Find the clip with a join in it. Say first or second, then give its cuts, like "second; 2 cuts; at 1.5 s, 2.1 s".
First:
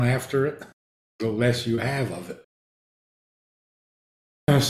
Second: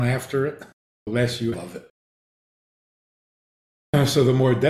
second; 2 cuts; at 1.1 s, 1.5 s